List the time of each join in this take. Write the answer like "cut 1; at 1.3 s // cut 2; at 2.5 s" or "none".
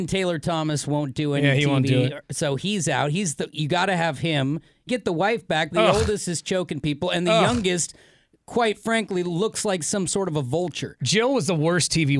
cut 1; at 4.9 s // cut 2; at 5.7 s